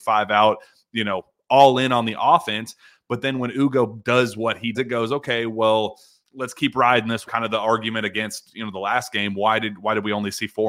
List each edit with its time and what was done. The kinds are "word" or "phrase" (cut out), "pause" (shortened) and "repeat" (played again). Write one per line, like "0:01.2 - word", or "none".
0:04.7 - word
0:06.2 - word
0:07.3 - word

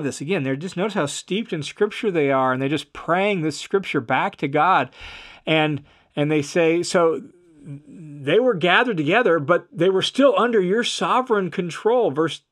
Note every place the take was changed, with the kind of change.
none

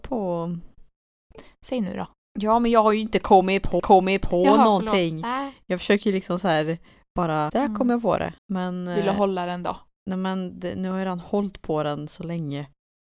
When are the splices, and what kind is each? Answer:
0:03.8 - repeat
0:07.5 - word
0:08.4 - pause

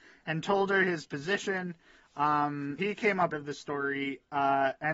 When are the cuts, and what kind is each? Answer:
0:02.8 - word
0:03.3 - phrase

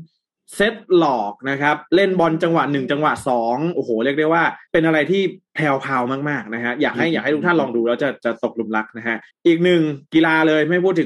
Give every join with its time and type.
0:01.9 - pause
0:04.6 - pause
0:09.3 - pause
0:10.0 - pause

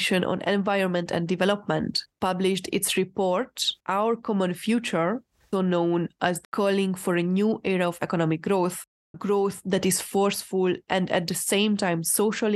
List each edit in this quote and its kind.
0:03.8 - pause
0:05.5 - word
0:06.4 - phrase
0:09.1 - word

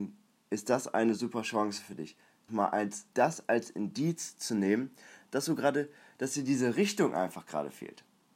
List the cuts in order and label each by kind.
0:02.5 - word
0:03.1 - pause

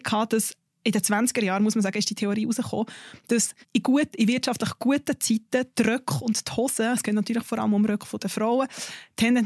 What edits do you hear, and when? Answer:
0:03.6 - pause

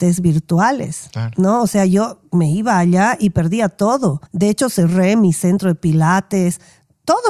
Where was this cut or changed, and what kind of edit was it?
0:04.3 - pause

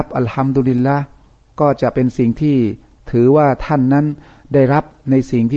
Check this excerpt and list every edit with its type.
none

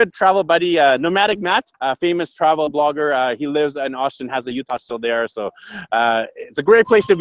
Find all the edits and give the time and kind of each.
0:01.7 - pause

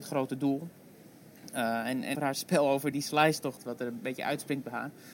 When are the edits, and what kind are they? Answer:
0:02.1 - word
0:02.9 - word
0:03.6 - word

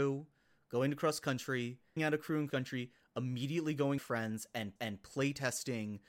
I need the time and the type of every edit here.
0:02.0 - word
0:02.5 - word
0:04.0 - phrase
0:04.8 - repeat

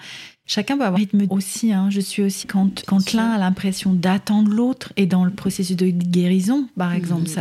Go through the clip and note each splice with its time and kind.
0:01.0 - word
0:01.3 - word
0:02.4 - word
0:02.8 - word

